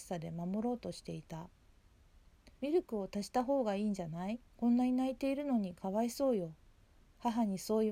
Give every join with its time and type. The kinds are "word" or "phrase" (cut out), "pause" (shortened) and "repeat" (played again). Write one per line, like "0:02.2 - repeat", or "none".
0:02.6 - pause
0:04.5 - pause